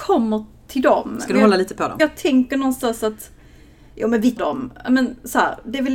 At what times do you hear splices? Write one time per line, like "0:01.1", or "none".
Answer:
0:02.0
0:04.4